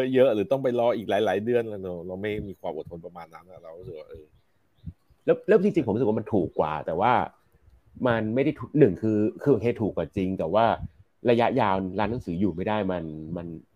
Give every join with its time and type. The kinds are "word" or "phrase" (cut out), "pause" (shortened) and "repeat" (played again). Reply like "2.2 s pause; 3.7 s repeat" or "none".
none